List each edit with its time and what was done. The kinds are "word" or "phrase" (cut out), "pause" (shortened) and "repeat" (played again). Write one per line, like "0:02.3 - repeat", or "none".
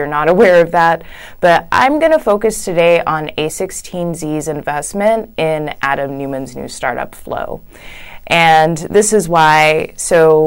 none